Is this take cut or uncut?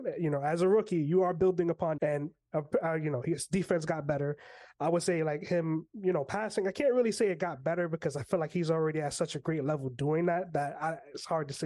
cut